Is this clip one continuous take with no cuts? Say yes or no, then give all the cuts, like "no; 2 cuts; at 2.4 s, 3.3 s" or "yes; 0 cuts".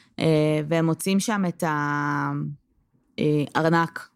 yes; 0 cuts